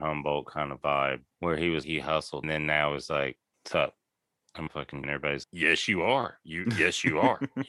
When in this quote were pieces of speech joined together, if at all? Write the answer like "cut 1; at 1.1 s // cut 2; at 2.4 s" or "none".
cut 1; at 1.3 s // cut 2; at 1.8 s // cut 3; at 2.4 s // cut 4; at 3.5 s // cut 5; at 4.7 s // cut 6; at 5.0 s // cut 7; at 5.4 s